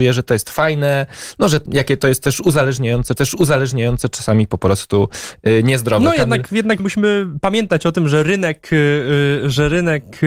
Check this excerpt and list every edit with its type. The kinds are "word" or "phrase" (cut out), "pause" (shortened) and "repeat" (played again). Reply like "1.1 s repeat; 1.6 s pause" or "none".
1.7 s phrase; 3.2 s repeat; 6.8 s word